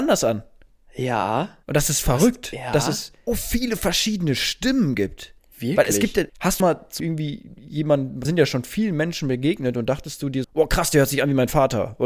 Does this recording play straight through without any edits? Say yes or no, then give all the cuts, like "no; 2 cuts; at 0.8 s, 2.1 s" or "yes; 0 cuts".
no; 8 cuts; at 1.6 s, 3.3 s, 5.4 s, 6.3 s, 6.6 s, 7.0 s, 8.2 s, 10.4 s